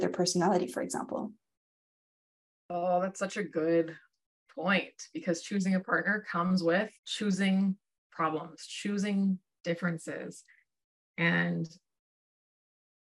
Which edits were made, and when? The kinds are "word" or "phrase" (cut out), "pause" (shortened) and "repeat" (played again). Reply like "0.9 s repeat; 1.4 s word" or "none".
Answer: 7.0 s pause

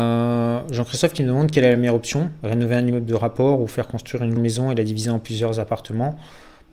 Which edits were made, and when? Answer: 4.4 s word

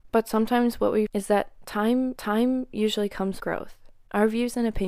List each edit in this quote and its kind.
1.1 s word; 2.2 s repeat; 3.4 s word

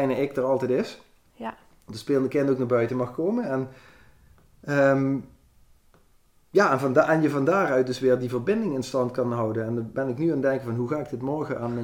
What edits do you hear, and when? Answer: none

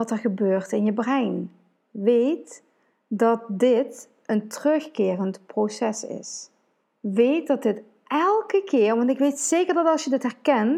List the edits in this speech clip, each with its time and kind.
6.8 s pause

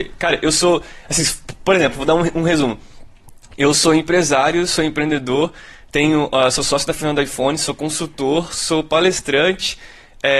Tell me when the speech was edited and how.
none

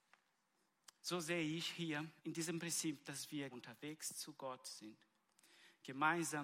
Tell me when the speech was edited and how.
2.2 s pause; 3.5 s word

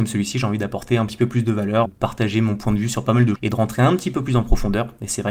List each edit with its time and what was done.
1.9 s word; 3.4 s word

